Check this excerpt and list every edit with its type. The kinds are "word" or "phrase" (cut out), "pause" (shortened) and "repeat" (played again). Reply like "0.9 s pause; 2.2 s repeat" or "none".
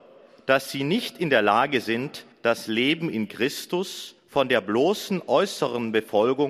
2.3 s pause; 4.2 s pause